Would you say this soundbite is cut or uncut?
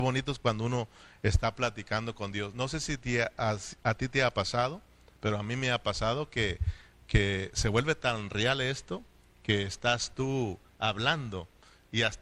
uncut